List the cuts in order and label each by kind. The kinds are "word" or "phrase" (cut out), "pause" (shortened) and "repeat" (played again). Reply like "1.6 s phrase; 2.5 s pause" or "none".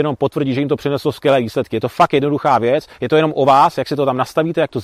none